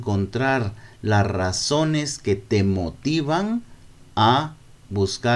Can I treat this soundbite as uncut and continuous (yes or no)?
yes